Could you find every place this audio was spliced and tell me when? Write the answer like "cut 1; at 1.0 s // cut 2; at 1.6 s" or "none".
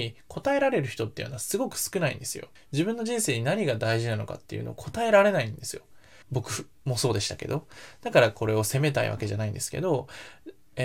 cut 1; at 2.6 s // cut 2; at 6.2 s